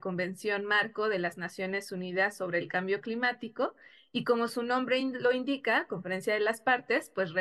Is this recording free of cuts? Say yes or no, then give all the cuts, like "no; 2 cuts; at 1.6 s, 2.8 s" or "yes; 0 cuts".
yes; 0 cuts